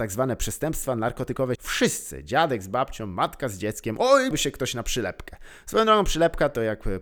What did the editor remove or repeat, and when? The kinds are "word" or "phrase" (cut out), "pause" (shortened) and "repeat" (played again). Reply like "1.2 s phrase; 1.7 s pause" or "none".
1.5 s word; 4.3 s word